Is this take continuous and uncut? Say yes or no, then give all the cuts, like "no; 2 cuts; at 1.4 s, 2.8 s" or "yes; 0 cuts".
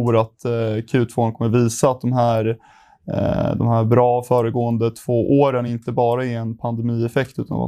yes; 0 cuts